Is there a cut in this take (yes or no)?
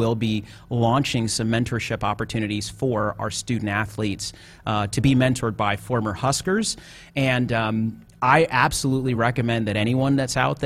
no